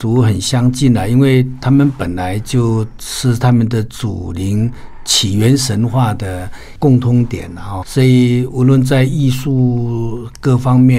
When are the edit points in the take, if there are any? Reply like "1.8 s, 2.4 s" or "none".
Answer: 7.8 s